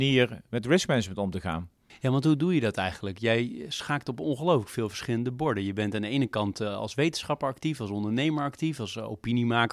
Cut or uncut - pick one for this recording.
cut